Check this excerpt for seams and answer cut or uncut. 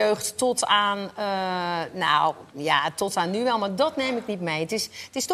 uncut